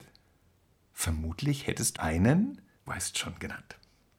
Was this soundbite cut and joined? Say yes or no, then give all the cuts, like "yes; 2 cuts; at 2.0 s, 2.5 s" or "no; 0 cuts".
yes; 2 cuts; at 2.0 s, 2.9 s